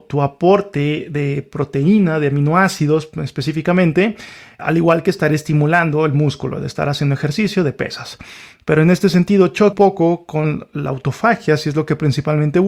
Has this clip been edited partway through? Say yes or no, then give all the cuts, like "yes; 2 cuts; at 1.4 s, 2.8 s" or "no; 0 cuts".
yes; 2 cuts; at 4.6 s, 9.7 s